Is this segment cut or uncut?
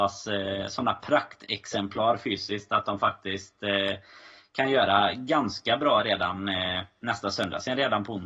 uncut